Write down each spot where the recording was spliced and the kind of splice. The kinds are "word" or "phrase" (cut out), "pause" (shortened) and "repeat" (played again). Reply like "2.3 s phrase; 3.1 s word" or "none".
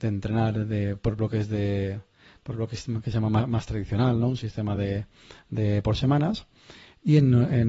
none